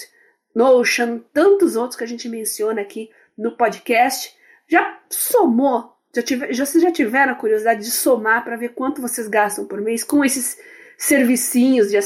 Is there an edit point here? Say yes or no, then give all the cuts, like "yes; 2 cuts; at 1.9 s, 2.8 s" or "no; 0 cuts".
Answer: no; 0 cuts